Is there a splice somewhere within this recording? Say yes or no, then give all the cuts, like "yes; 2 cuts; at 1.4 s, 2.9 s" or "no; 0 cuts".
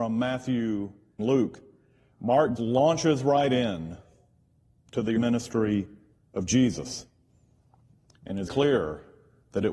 yes; 4 cuts; at 1.2 s, 2.6 s, 5.2 s, 8.5 s